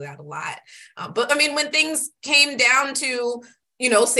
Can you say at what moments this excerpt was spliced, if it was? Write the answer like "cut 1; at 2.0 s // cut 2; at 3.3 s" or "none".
none